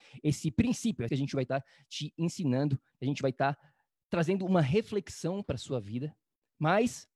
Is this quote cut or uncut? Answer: cut